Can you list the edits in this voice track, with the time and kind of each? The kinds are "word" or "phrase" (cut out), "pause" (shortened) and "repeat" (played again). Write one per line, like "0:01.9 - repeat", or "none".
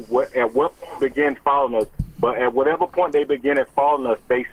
0:01.0 - word